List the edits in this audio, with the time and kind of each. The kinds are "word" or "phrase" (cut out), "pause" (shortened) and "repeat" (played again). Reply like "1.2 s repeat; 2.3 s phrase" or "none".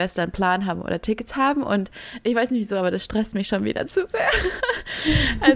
none